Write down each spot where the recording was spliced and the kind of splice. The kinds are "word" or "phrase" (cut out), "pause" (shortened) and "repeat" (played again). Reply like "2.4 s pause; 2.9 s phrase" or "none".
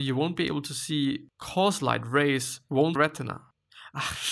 2.9 s phrase